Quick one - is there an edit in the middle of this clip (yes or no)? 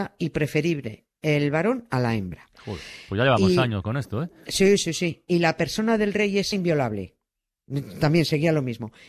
yes